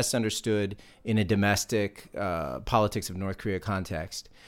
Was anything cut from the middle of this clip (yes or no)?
no